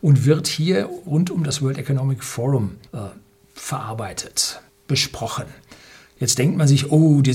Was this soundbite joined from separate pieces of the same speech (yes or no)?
yes